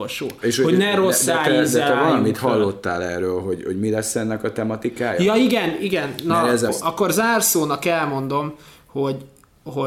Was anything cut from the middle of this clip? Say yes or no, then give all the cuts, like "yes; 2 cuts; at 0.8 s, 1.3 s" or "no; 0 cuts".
yes; 1 cut; at 6.7 s